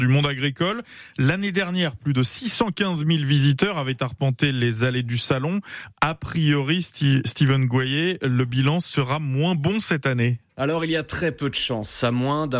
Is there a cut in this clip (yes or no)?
no